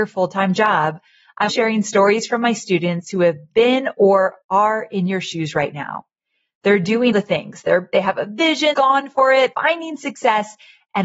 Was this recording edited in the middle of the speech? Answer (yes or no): yes